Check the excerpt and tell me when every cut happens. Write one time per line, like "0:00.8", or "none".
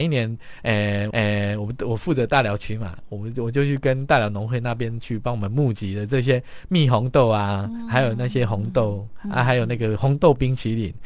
0:01.1